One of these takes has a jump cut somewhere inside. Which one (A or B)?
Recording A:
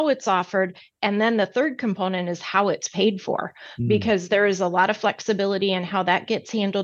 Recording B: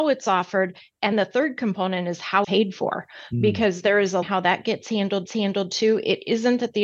B